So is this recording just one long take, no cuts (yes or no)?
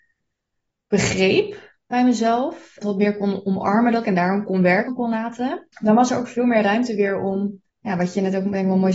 no